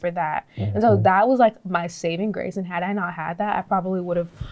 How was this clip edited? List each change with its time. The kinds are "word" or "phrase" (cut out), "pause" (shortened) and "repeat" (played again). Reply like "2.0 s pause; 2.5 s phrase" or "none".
none